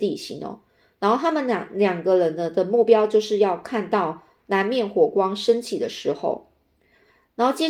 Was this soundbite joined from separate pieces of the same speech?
no; 0 cuts

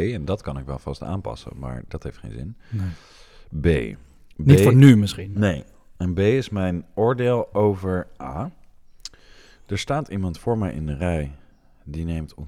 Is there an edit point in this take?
no; 0 cuts

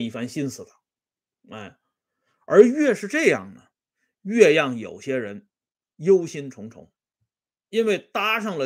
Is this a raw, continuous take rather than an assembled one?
yes; 0 cuts

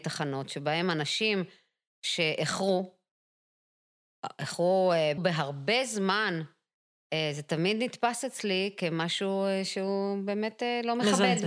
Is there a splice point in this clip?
yes; 1 cut; at 5.2 s

